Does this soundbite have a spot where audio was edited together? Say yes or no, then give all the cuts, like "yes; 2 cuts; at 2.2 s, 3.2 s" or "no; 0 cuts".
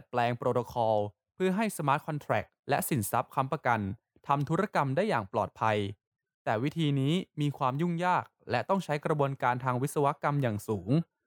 no; 0 cuts